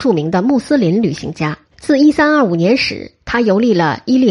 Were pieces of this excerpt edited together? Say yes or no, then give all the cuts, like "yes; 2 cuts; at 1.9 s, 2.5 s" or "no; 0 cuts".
yes; 1 cut; at 1.7 s